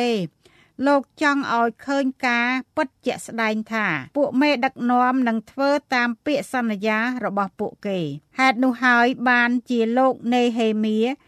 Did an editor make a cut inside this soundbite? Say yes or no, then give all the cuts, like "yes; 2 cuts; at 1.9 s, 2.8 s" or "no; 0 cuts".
yes; 3 cuts; at 3.0 s, 4.1 s, 8.3 s